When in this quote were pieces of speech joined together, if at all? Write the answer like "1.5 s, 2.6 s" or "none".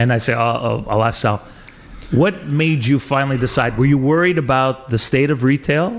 none